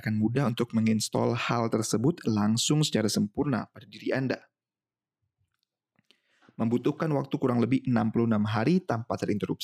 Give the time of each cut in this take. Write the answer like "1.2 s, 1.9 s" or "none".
none